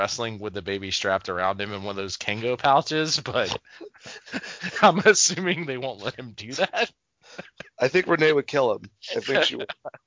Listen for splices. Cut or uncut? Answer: uncut